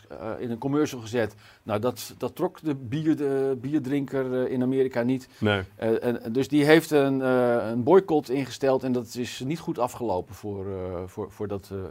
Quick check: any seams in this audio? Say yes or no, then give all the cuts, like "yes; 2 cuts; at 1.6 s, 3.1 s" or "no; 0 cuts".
no; 0 cuts